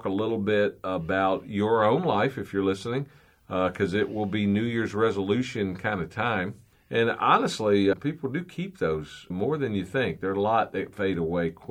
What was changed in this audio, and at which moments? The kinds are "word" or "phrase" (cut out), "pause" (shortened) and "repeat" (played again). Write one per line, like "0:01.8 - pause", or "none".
0:06.7 - pause
0:07.9 - word
0:09.3 - word

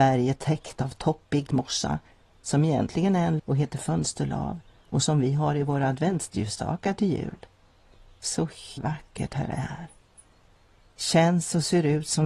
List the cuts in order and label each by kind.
0:01.5 - word
0:03.4 - word
0:08.8 - word

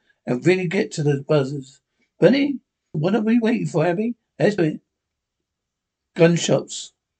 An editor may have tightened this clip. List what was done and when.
0:02.9 - word
0:04.6 - word

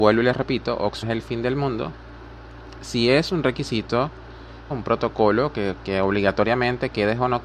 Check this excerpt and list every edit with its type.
0:01.0 - word
0:04.7 - word
0:05.8 - word

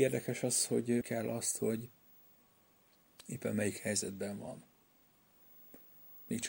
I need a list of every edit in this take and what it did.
0:01.0 - phrase

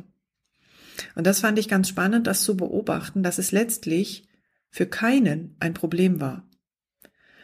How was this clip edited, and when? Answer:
none

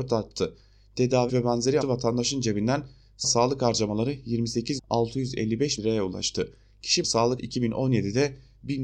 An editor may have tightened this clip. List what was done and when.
0:01.3 - word
0:01.8 - word
0:03.2 - word
0:04.8 - word
0:05.8 - word
0:07.0 - word
0:07.4 - word

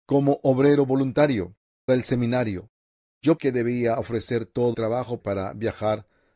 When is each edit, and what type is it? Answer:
0:01.9 - word
0:03.4 - word
0:04.7 - word
0:05.2 - word

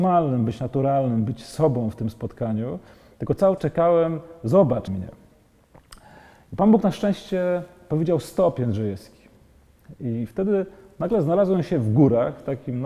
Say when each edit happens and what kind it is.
0:03.6 - word
0:04.9 - word

